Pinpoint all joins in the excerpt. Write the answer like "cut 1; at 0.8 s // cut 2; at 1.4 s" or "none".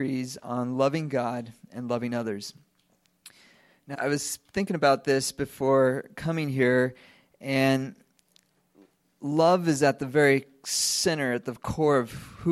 cut 1; at 3.9 s